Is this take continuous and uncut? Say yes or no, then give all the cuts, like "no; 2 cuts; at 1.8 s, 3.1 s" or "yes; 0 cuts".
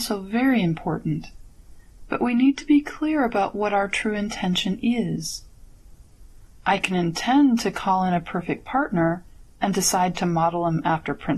yes; 0 cuts